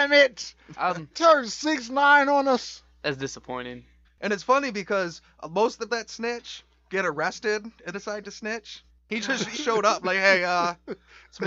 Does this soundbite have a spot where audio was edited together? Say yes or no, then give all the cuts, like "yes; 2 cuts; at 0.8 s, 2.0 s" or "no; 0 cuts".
yes; 6 cuts; at 1.1 s, 4.0 s, 5.9 s, 7.9 s, 8.9 s, 9.5 s